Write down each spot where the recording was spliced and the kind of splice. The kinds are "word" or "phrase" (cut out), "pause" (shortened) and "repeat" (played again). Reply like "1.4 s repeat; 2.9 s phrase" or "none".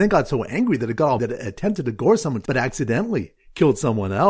1.2 s word; 2.5 s word